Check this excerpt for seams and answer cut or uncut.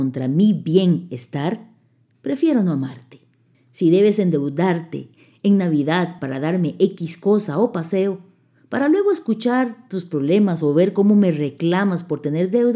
uncut